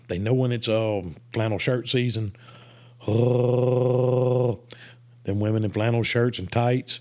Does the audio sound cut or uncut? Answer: uncut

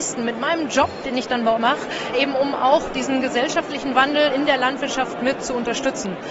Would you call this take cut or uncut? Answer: cut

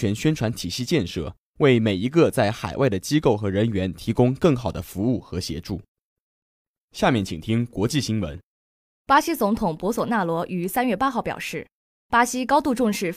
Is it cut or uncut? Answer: uncut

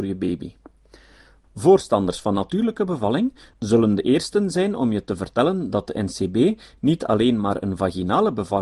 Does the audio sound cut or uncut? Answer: uncut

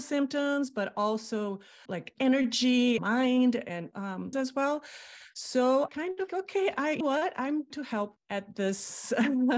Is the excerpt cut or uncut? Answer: cut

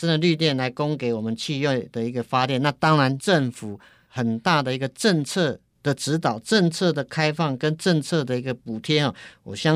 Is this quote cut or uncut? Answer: cut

